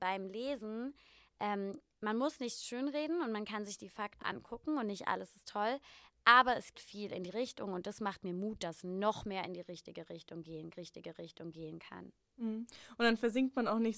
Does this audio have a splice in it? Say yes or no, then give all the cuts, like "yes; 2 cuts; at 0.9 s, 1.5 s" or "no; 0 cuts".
yes; 4 cuts; at 4.2 s, 6.7 s, 7.3 s, 10.7 s